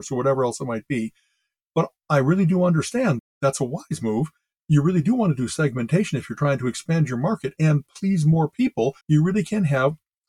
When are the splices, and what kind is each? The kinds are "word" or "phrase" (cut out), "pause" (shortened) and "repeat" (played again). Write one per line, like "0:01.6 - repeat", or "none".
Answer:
0:09.0 - pause